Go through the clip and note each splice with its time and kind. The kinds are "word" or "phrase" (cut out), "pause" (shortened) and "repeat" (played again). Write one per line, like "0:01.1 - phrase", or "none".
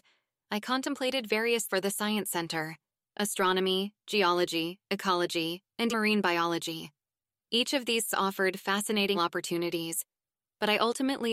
0:01.7 - word
0:05.9 - word
0:08.1 - word
0:09.1 - word